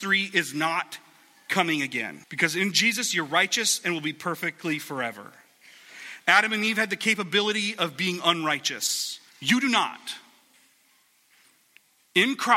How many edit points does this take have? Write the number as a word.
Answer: two